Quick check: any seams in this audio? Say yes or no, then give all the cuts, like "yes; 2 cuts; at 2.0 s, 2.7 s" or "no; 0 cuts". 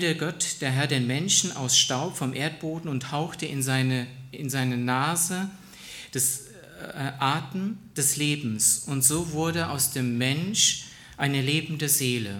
no; 0 cuts